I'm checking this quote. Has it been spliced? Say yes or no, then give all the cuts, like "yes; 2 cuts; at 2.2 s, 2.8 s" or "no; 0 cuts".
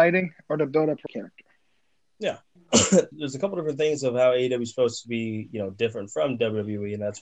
yes; 3 cuts; at 1.1 s, 2.6 s, 3.1 s